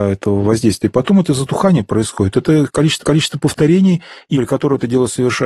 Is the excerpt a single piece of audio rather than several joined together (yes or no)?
no